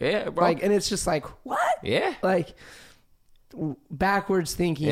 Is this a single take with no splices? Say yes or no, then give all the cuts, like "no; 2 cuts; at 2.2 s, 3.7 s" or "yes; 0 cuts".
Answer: yes; 0 cuts